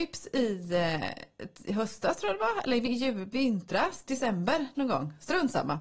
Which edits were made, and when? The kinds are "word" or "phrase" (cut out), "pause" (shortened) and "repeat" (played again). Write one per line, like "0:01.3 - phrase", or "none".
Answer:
none